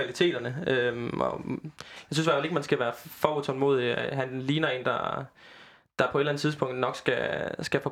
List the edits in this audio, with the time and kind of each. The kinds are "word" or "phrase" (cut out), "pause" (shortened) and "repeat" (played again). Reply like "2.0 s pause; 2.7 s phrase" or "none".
none

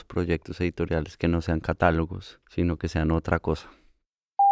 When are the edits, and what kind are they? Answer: 2.4 s pause

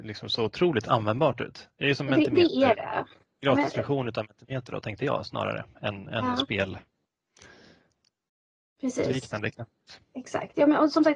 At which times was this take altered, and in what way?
none

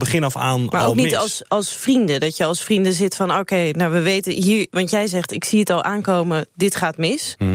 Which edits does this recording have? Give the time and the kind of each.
none

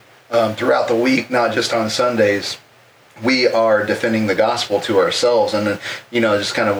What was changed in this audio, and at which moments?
none

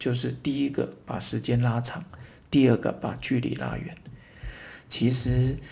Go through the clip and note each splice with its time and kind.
none

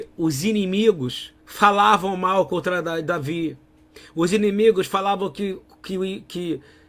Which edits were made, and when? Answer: 1.4 s pause

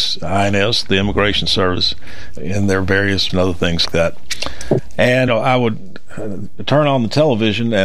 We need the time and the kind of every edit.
2.4 s word; 3.3 s word; 3.9 s word; 5.3 s phrase

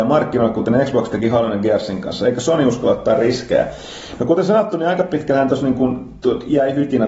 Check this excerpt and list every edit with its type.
none

